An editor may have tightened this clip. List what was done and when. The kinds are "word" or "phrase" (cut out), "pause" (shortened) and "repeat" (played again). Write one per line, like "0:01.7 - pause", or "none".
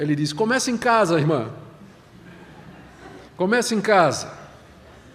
0:03.3 - pause